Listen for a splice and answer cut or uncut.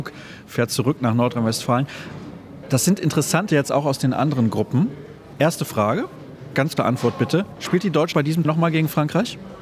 cut